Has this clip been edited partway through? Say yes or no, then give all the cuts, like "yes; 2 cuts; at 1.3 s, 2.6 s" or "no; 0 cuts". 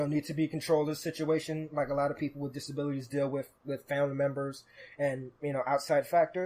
no; 0 cuts